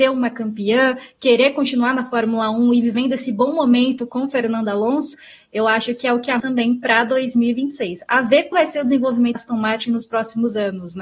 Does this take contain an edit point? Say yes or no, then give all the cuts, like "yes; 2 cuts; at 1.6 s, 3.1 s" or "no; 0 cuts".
yes; 3 cuts; at 6.4 s, 8.5 s, 9.4 s